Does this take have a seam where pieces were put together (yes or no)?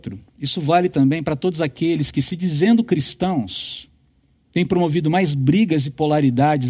no